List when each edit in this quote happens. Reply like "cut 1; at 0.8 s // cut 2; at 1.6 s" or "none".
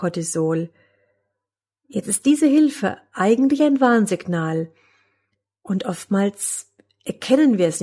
none